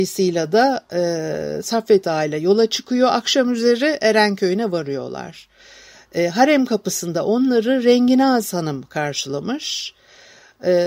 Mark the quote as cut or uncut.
uncut